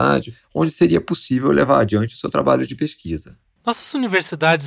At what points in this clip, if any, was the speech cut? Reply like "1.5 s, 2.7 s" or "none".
none